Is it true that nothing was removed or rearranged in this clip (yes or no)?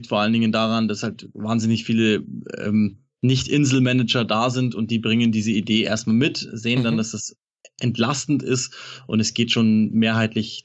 yes